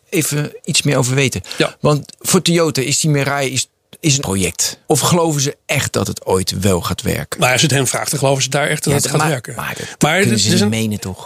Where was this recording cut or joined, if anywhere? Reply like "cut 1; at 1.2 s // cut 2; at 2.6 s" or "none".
cut 1; at 4.2 s // cut 2; at 4.8 s